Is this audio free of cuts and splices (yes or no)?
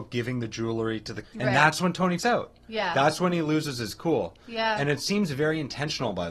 no